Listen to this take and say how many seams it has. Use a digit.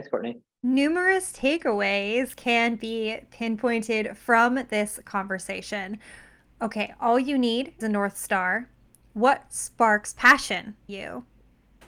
2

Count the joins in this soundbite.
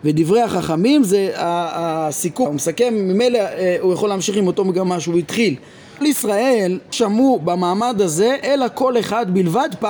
3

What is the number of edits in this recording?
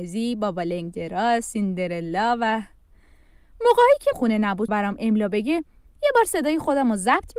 2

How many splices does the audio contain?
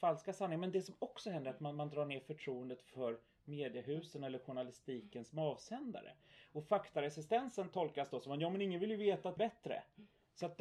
1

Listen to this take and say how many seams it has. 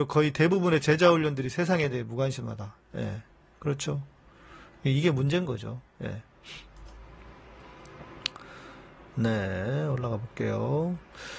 0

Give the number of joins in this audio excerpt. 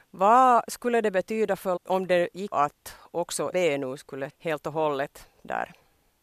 4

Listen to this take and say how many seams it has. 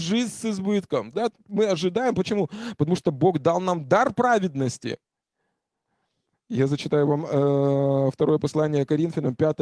0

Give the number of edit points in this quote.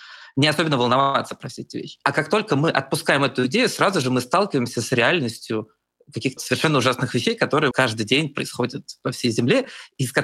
2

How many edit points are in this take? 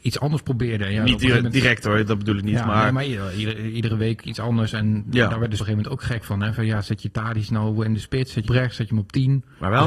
2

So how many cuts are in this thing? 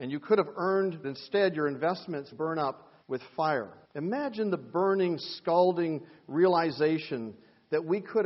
4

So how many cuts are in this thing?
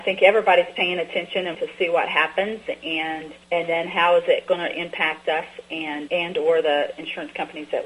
3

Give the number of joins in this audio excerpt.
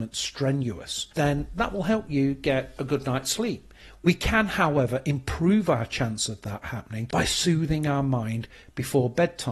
1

